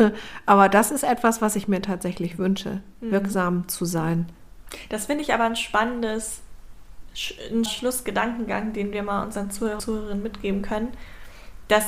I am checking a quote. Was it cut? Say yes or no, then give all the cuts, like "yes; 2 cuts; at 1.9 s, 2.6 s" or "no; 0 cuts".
yes; 2 cuts; at 7.7 s, 9.8 s